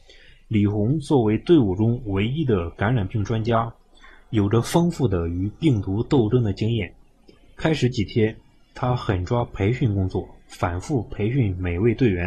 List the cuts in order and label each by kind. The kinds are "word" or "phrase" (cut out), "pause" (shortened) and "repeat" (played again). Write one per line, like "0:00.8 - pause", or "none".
none